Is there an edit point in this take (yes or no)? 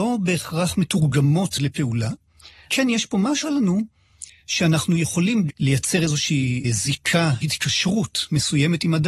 yes